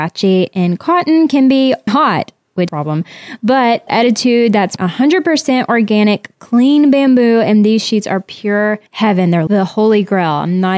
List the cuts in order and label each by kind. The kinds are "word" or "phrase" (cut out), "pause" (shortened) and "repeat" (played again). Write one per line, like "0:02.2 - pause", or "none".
0:01.9 - word
0:02.7 - phrase
0:03.9 - word
0:04.8 - word
0:08.9 - pause
0:09.5 - word

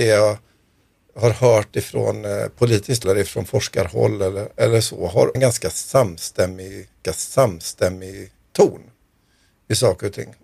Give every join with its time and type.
0:03.0 - word
0:05.3 - word
0:07.0 - repeat

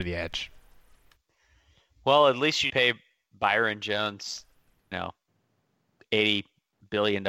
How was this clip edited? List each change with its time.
0:02.7 - word
0:04.9 - word

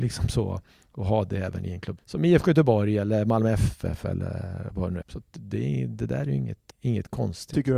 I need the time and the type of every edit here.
0:02.0 - word
0:05.0 - word
0:06.7 - word

